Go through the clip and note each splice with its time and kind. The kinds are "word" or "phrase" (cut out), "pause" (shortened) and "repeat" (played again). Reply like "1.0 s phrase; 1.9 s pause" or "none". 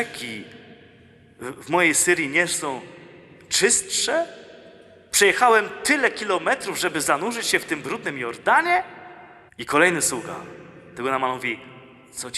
9.5 s pause